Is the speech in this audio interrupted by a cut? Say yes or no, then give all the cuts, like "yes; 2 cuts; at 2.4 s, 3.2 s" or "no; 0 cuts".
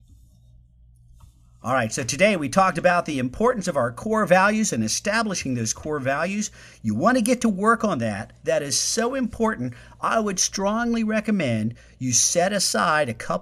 no; 0 cuts